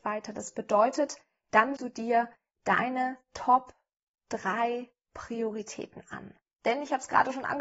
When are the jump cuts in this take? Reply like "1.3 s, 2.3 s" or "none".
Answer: 1.8 s